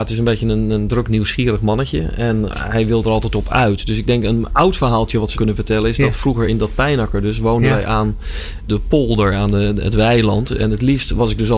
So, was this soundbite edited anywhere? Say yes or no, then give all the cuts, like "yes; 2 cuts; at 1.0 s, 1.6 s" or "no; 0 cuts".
yes; 3 cuts; at 2.5 s, 5.3 s, 8.7 s